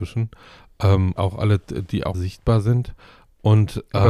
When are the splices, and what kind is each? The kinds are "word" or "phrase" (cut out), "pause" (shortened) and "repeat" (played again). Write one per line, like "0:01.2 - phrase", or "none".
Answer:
0:01.2 - word
0:02.1 - word